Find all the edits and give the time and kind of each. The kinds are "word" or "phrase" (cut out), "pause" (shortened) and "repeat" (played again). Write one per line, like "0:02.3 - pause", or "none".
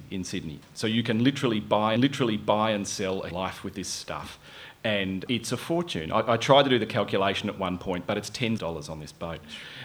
0:02.0 - repeat
0:03.3 - word
0:05.3 - word
0:08.6 - phrase